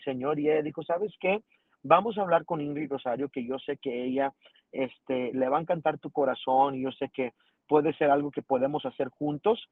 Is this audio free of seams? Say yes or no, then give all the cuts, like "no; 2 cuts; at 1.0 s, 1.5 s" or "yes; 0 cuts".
yes; 0 cuts